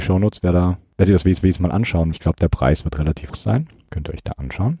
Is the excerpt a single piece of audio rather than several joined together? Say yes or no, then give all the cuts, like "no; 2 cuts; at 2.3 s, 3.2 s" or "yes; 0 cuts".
no; 3 cuts; at 1.4 s, 2.1 s, 3.3 s